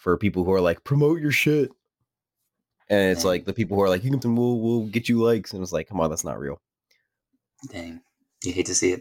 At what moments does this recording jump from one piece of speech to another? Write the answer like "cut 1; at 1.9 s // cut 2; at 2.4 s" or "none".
cut 1; at 4.2 s